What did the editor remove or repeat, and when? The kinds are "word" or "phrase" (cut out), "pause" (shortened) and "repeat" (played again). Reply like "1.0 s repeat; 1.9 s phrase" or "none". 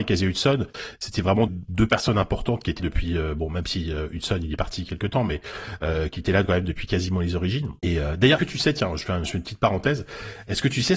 1.5 s word; 2.8 s word; 7.8 s pause; 8.4 s word